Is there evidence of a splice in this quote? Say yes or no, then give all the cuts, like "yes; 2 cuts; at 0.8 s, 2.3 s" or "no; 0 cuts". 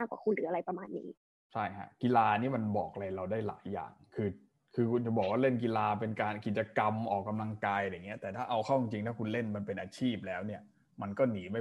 no; 0 cuts